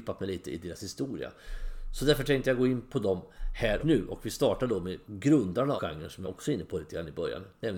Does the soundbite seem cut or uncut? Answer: cut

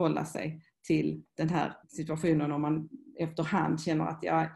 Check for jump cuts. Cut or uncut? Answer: cut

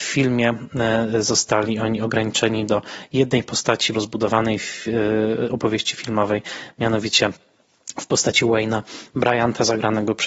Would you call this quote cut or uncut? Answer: cut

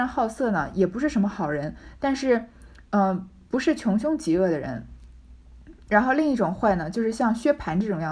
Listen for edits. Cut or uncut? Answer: uncut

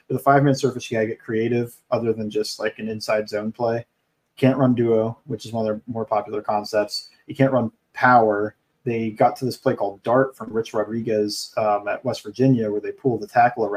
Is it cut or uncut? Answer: uncut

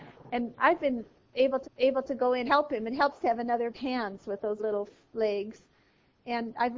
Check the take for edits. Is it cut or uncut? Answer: cut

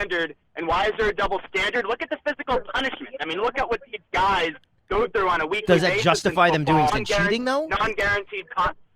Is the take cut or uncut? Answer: cut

